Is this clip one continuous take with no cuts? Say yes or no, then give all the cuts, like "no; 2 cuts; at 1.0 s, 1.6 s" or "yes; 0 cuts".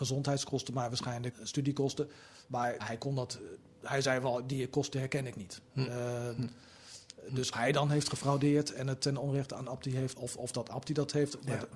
no; 4 cuts; at 1.3 s, 2.8 s, 7.5 s, 10.1 s